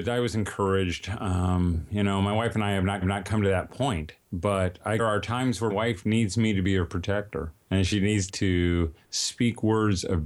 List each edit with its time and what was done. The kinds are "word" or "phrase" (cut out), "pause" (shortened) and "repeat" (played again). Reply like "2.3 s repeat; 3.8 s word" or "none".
3.0 s repeat; 4.2 s pause; 5.0 s phrase; 5.7 s word; 7.6 s pause; 8.3 s word